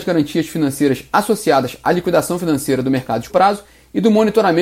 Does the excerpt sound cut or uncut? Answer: cut